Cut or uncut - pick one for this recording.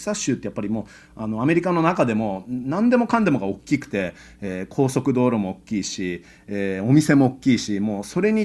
uncut